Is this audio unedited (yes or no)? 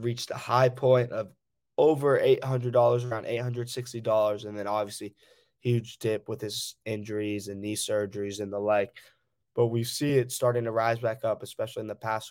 yes